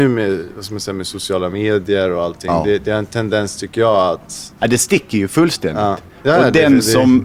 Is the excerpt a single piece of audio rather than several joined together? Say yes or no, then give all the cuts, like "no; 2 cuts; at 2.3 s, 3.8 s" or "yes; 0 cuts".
no; 1 cut; at 4.6 s